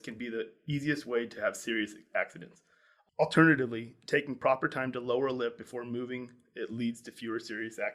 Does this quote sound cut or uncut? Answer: uncut